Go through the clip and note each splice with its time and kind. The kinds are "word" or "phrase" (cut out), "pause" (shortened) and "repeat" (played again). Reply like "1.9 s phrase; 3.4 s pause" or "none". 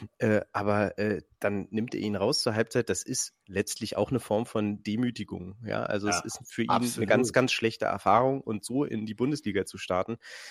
none